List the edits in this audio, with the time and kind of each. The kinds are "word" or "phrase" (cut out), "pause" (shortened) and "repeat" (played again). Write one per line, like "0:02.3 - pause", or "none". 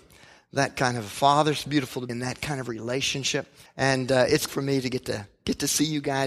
0:02.1 - word
0:03.7 - pause
0:04.5 - word

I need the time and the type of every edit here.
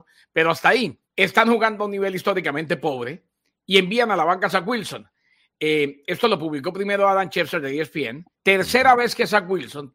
0:01.0 - pause
0:08.3 - pause

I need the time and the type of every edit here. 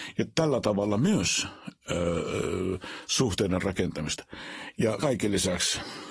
0:05.0 - word

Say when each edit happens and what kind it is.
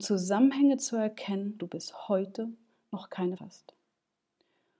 0:01.6 - word
0:03.4 - word

